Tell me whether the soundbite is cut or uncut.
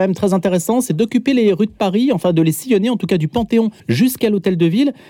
cut